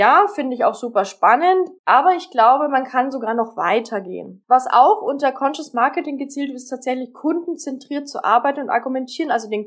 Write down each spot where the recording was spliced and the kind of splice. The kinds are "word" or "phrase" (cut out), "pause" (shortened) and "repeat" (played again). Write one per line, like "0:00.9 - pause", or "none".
0:01.8 - pause
0:04.4 - pause